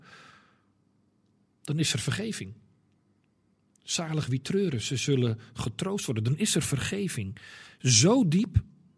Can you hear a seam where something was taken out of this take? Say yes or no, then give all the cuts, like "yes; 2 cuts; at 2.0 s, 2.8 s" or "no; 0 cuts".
no; 0 cuts